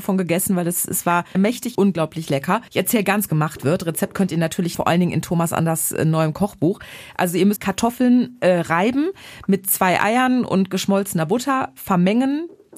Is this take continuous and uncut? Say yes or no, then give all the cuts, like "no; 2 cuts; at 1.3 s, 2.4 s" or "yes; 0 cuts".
no; 6 cuts; at 1.3 s, 1.7 s, 2.7 s, 3.3 s, 4.7 s, 7.6 s